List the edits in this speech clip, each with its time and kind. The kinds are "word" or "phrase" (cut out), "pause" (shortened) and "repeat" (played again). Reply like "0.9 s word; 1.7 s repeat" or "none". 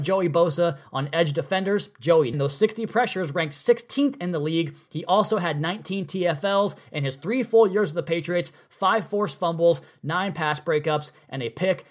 2.3 s phrase